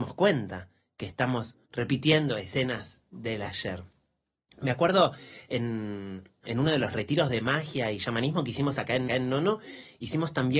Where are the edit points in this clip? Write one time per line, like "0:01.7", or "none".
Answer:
0:01.6
0:06.5
0:09.1